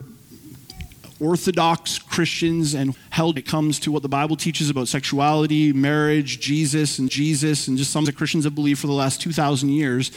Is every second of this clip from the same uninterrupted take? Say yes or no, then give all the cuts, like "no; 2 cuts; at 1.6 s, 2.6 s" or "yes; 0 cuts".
no; 4 cuts; at 2.9 s, 3.4 s, 7.1 s, 8.1 s